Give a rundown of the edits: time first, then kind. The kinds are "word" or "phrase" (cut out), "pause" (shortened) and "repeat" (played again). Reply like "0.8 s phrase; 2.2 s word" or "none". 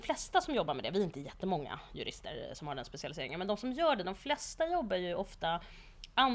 none